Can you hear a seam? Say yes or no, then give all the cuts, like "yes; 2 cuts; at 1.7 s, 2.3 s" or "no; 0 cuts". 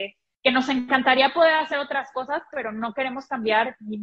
no; 0 cuts